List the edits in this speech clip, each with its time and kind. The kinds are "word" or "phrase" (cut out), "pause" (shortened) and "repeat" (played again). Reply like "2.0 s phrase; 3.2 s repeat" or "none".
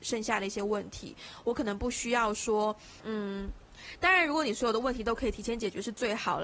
3.0 s pause